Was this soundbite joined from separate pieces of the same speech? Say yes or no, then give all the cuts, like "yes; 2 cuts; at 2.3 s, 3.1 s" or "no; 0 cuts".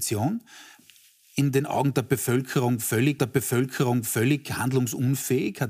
yes; 1 cut; at 3.2 s